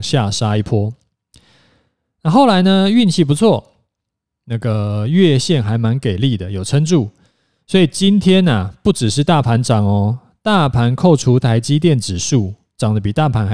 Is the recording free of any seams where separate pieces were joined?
yes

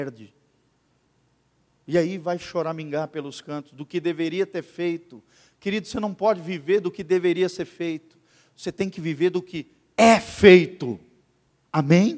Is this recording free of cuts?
yes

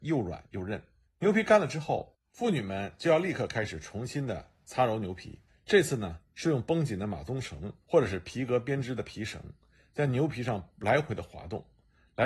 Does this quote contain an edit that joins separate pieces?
yes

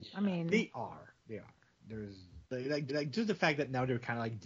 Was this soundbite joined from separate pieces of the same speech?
yes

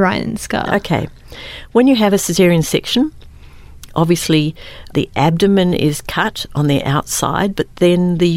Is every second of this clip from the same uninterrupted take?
yes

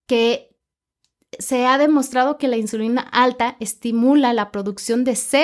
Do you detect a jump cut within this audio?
no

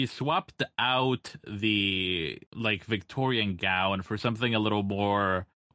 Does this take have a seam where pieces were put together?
yes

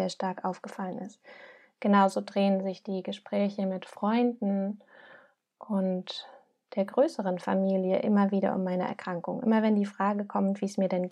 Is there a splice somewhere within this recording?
no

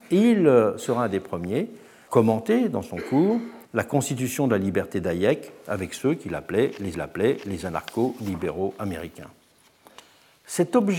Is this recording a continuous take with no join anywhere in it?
no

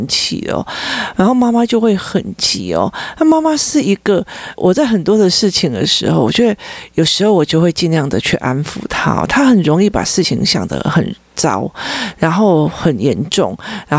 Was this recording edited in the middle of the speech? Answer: yes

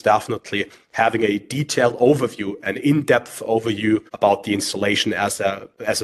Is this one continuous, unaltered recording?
no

